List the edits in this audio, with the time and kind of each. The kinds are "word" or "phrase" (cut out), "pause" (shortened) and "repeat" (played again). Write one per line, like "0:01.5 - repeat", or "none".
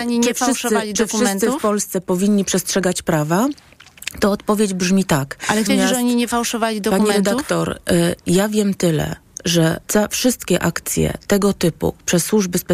0:05.7 - phrase
0:09.8 - pause